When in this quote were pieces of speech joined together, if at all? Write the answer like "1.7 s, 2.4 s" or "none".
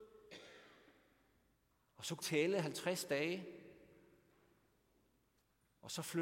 2.2 s